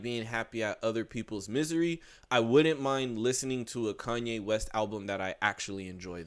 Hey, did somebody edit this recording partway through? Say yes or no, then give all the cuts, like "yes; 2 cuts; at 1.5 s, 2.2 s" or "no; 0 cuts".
no; 0 cuts